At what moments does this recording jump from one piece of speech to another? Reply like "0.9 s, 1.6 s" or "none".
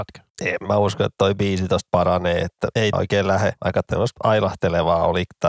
2.9 s